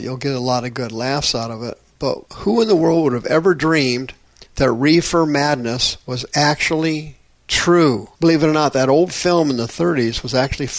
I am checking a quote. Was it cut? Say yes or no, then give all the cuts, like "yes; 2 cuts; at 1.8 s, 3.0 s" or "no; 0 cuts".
yes; 3 cuts; at 2.3 s, 4.5 s, 8.2 s